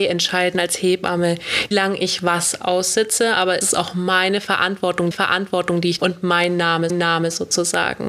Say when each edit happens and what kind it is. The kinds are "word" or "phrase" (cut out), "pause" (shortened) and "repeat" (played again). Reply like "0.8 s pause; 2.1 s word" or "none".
1.7 s word; 3.6 s word; 5.1 s repeat; 6.0 s phrase; 6.9 s repeat